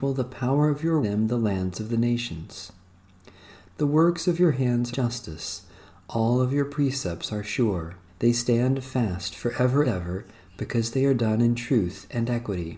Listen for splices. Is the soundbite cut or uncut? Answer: cut